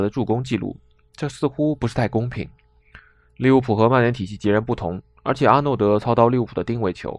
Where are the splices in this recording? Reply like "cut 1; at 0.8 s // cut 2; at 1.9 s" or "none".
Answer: none